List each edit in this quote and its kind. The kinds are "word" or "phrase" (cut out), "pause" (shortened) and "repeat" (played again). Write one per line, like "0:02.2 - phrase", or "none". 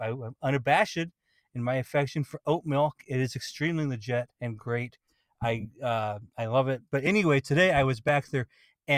0:04.3 - pause